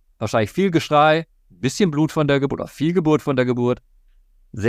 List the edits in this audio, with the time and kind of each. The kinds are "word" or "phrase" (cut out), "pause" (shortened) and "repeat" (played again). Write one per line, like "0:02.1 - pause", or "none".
none